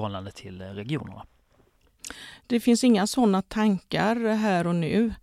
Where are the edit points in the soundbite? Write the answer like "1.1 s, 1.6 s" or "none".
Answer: none

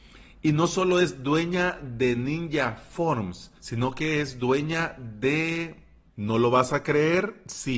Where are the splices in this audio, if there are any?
3.6 s

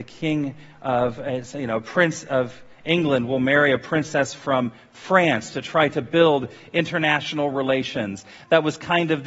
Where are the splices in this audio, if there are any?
none

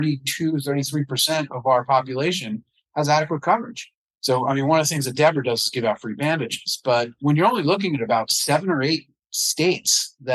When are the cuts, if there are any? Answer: none

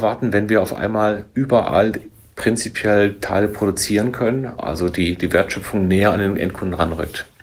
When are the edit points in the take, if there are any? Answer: none

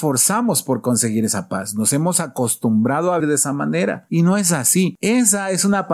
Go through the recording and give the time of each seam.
3.2 s

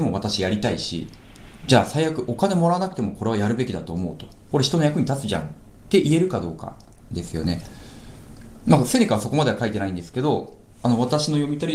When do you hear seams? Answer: none

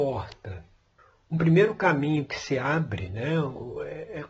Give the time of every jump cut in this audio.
1.0 s

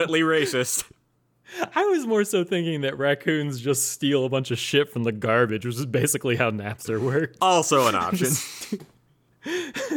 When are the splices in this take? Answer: none

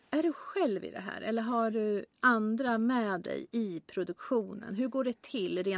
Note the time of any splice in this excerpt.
2.1 s

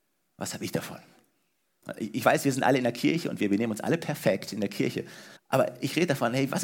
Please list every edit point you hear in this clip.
5.4 s

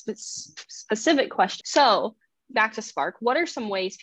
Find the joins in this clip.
2.5 s

